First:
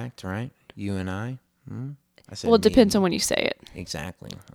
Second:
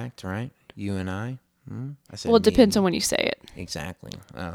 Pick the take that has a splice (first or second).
second